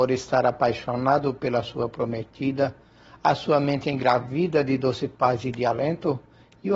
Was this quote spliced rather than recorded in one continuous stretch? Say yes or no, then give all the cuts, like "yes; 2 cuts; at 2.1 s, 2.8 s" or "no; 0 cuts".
no; 0 cuts